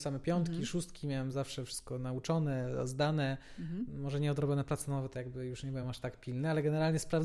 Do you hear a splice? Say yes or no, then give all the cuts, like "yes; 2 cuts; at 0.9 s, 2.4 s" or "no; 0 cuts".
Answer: no; 0 cuts